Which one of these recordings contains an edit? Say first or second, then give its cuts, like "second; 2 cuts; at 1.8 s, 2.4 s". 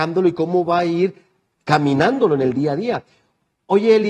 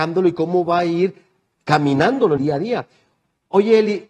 second; 1 cut; at 2.4 s